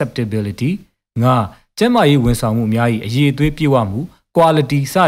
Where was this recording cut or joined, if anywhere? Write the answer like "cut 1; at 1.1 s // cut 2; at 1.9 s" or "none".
none